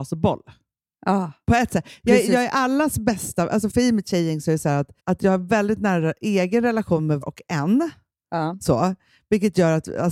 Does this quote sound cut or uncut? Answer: cut